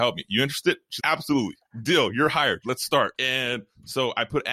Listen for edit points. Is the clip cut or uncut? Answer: cut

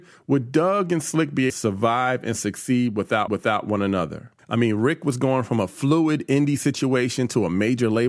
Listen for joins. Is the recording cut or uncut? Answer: cut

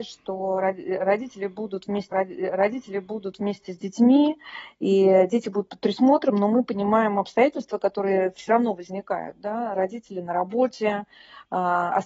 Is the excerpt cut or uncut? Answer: cut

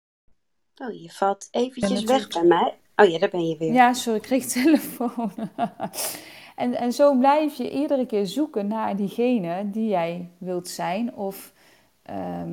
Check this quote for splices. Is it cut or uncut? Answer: uncut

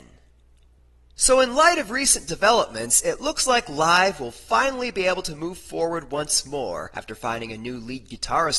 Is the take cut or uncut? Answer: uncut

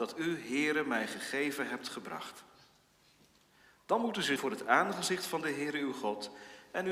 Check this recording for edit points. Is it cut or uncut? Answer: cut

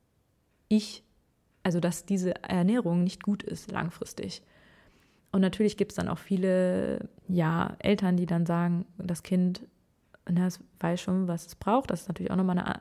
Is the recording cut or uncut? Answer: cut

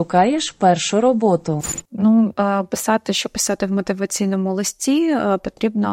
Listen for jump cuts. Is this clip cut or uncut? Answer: uncut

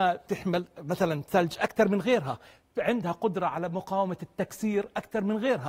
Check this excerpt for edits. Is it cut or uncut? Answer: uncut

